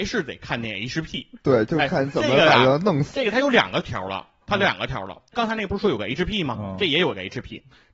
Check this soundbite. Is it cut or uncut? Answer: uncut